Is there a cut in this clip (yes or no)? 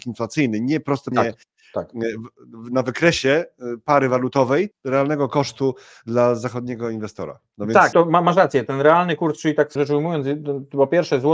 yes